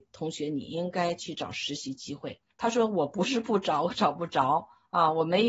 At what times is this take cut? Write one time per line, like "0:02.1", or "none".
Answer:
0:02.5